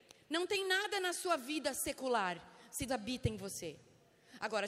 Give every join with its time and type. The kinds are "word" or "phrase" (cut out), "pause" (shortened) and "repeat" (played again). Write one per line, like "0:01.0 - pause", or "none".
0:02.9 - word

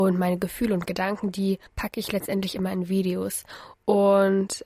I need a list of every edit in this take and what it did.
0:01.7 - pause

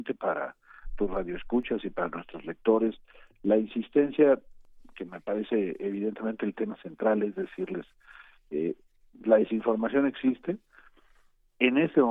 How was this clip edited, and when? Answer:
none

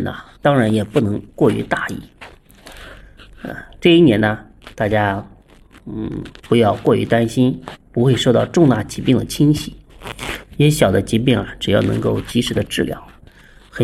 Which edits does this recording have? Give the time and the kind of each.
0:06.4 - pause

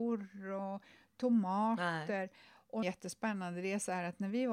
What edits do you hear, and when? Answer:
0:02.8 - phrase

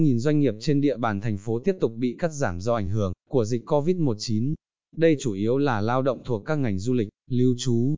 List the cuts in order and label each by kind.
none

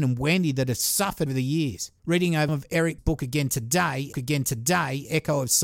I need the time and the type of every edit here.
0:01.3 - word
0:02.0 - pause
0:02.5 - word
0:03.0 - word
0:04.1 - repeat

